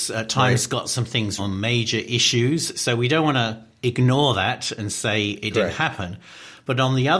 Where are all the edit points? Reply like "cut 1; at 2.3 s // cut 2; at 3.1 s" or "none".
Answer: cut 1; at 1.4 s